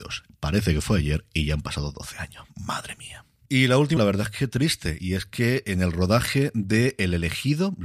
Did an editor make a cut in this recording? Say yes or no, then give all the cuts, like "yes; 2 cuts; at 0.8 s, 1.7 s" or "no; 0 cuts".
yes; 1 cut; at 4.0 s